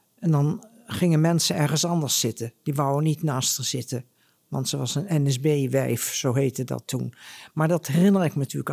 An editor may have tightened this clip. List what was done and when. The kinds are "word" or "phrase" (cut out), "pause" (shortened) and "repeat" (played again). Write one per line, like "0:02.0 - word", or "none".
none